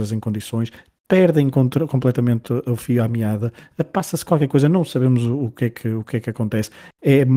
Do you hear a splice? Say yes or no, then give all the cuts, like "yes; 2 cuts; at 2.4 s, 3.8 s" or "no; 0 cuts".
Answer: no; 0 cuts